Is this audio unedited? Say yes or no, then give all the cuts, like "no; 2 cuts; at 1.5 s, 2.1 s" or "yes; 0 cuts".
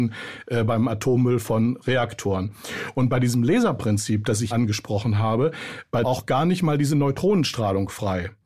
no; 2 cuts; at 4.5 s, 6.0 s